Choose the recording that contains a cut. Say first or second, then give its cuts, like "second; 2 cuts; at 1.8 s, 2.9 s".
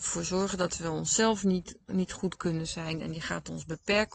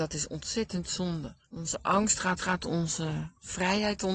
second; 2 cuts; at 1.4 s, 2.4 s